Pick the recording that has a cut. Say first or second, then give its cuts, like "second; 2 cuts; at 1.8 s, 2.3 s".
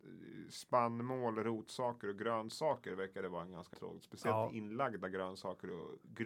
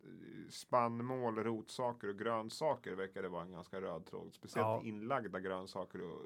first; 1 cut; at 3.7 s